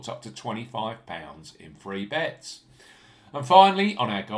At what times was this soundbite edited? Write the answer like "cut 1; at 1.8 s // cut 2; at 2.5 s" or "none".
none